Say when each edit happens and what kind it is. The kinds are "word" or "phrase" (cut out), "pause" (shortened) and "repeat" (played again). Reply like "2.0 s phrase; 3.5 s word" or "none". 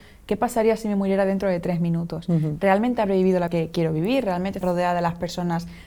3.5 s word; 4.6 s word

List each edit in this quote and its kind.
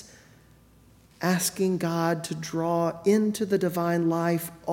none

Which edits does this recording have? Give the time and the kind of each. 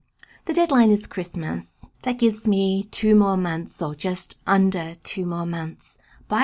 1.9 s pause

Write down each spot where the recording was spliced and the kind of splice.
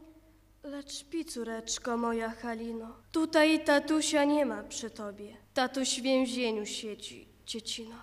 3.0 s pause; 5.4 s pause

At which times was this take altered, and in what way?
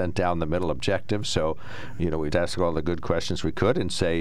2.3 s word

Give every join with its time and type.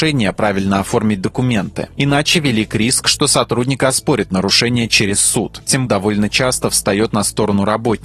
5.9 s phrase

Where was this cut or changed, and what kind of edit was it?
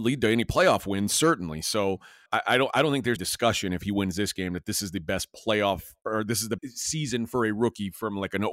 2.3 s word; 3.2 s word; 6.6 s word

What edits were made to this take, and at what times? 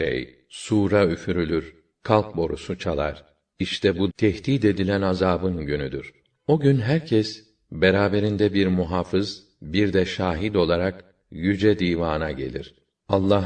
4.1 s word

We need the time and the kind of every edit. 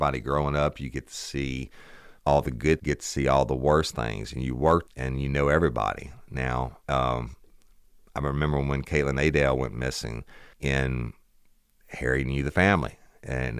2.2 s pause; 2.8 s phrase; 4.9 s word; 6.8 s pause; 10.5 s pause

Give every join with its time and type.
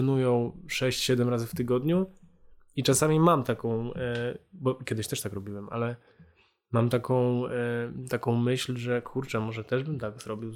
none

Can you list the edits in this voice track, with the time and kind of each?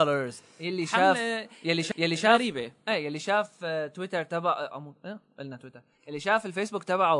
1.9 s repeat

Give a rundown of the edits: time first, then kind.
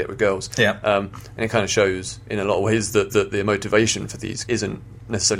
3.1 s repeat; 4.4 s word

